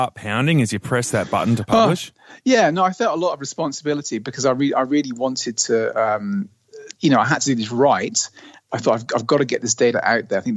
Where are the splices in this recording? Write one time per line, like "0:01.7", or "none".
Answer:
none